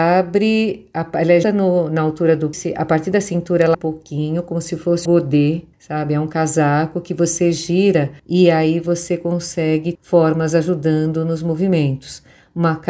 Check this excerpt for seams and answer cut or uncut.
cut